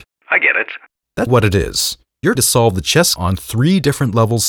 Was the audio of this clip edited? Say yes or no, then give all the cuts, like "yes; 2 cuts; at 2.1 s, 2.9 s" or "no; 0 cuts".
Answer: yes; 3 cuts; at 1.3 s, 2.4 s, 3.2 s